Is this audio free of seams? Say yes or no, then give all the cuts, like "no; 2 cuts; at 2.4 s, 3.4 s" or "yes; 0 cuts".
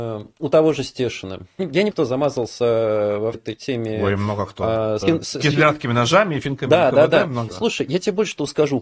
no; 5 cuts; at 1.6 s, 1.9 s, 3.3 s, 5.0 s, 7.5 s